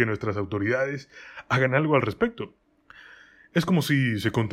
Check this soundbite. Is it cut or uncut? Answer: uncut